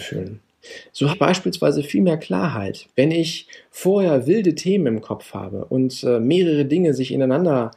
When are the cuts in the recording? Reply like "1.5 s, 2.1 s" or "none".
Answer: 1.1 s, 2.9 s